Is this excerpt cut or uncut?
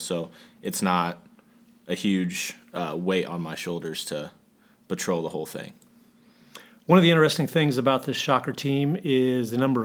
uncut